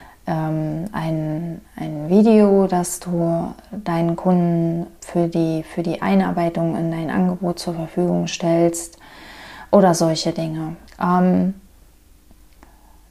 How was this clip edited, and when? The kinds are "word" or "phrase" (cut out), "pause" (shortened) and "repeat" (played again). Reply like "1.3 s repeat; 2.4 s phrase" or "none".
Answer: 5.0 s pause; 10.9 s pause

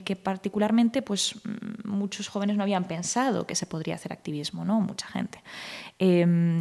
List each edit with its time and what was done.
none

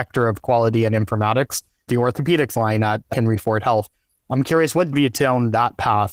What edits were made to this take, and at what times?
1.9 s word; 4.9 s word

